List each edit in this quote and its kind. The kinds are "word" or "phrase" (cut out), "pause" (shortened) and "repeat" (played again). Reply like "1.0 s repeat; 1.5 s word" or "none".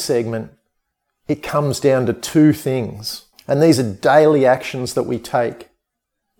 3.3 s pause